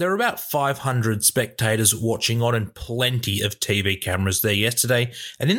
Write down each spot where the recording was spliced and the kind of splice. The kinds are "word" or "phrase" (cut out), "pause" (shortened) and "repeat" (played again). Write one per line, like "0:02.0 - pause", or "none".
none